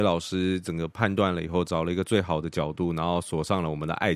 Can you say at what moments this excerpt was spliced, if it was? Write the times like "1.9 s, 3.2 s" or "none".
none

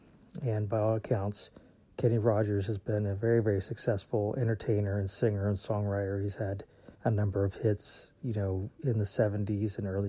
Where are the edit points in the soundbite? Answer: 1.6 s, 6.9 s

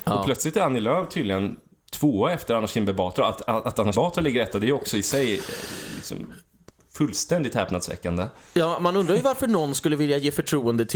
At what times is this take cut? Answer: 3.9 s

